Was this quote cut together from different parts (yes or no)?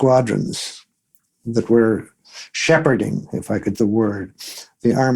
yes